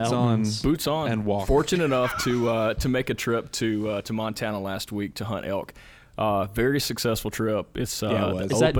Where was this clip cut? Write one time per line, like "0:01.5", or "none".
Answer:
none